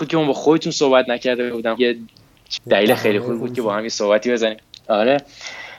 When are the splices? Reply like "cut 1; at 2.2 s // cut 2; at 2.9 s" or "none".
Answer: cut 1; at 1.8 s // cut 2; at 2.6 s